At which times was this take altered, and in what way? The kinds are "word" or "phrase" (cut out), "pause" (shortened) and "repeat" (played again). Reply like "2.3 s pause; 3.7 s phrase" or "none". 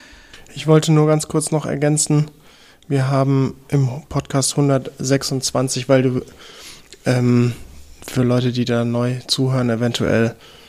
none